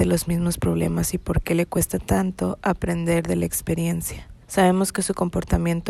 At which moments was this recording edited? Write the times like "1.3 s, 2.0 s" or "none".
4.4 s